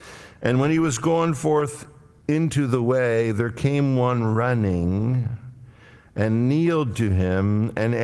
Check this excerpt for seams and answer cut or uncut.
uncut